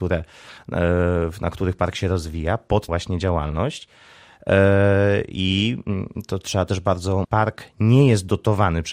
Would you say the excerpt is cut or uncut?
cut